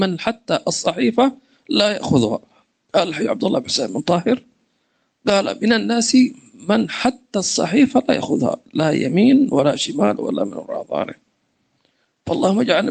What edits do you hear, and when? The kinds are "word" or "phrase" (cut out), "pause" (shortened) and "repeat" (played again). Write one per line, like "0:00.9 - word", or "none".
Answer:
none